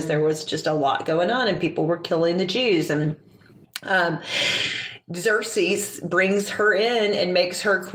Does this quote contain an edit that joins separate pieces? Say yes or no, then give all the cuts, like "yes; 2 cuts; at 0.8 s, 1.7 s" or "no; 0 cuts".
no; 0 cuts